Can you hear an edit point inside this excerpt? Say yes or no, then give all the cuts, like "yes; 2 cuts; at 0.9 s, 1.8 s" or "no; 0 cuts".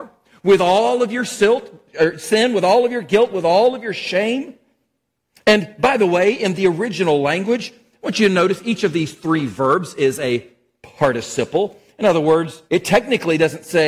yes; 1 cut; at 12.7 s